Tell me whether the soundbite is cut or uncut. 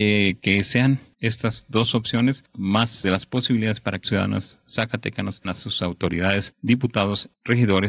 cut